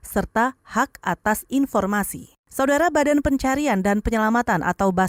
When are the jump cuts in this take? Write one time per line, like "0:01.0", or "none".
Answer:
0:02.4